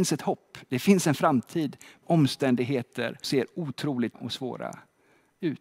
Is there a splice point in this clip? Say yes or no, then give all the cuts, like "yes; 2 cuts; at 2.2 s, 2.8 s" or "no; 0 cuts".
yes; 3 cuts; at 2.0 s, 3.2 s, 4.1 s